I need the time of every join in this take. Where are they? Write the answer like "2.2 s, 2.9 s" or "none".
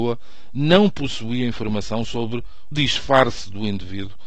2.7 s